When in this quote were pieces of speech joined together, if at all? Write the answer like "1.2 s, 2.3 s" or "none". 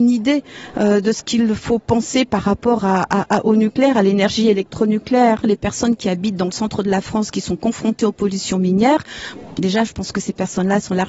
none